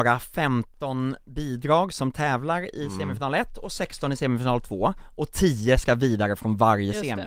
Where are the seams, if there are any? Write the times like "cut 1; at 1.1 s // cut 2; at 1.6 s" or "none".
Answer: none